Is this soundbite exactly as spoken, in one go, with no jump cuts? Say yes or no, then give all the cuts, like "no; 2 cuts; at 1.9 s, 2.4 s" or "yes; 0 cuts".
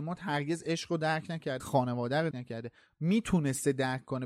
no; 2 cuts; at 1.6 s, 2.3 s